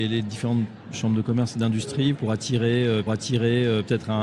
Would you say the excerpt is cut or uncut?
cut